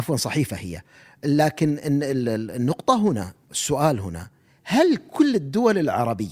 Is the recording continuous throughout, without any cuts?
yes; 0 cuts

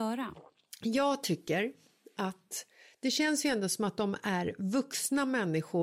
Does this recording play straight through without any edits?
yes; 0 cuts

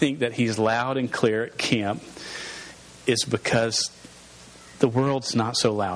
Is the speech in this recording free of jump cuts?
yes; 0 cuts

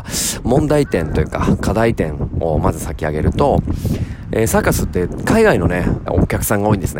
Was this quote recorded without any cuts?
no; 1 cut; at 6.1 s

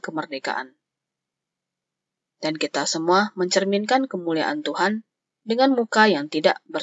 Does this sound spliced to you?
no; 0 cuts

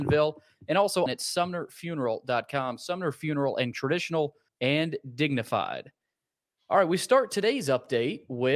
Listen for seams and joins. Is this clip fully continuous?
no; 3 cuts; at 1.1 s, 3.7 s, 4.5 s

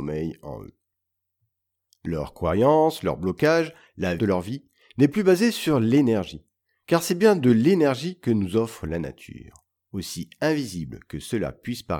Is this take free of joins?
no; 1 cut; at 4.2 s

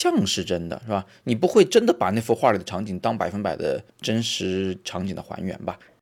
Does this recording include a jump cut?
yes; 1 cut; at 3.9 s

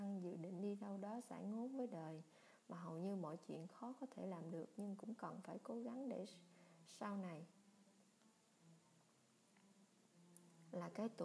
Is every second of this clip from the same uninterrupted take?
yes; 0 cuts

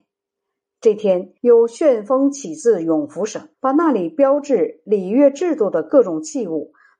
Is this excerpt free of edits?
no; 2 cuts; at 1.4 s, 3.5 s

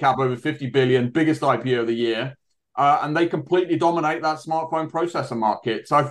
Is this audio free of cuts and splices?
yes; 0 cuts

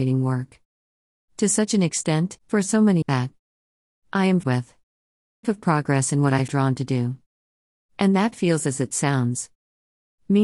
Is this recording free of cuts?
no; 5 cuts; at 2.4 s, 3.0 s, 4.4 s, 5.4 s, 6.5 s

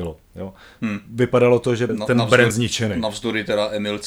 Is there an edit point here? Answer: yes; 2 cuts; at 1.9 s, 2.5 s

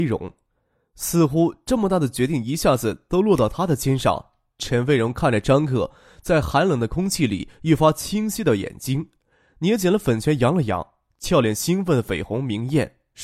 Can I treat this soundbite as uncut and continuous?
yes; 0 cuts

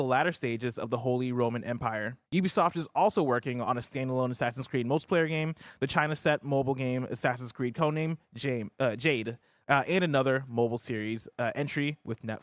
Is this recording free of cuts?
no; 1 cut; at 2.3 s

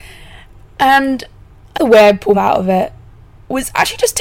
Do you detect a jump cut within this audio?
yes; 2 cuts; at 1.7 s, 2.3 s

